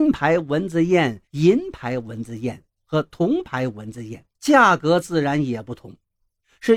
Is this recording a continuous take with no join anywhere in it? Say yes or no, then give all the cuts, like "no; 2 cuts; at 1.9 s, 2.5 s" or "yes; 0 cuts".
no; 2 cuts; at 1.3 s, 4.3 s